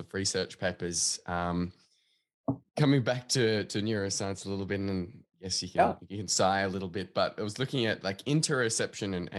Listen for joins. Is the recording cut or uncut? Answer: uncut